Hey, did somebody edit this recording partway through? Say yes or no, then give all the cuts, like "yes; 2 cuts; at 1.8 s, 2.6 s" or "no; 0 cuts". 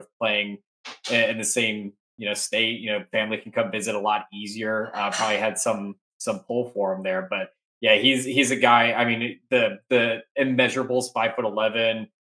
no; 0 cuts